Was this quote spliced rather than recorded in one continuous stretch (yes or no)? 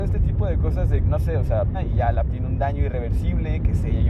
yes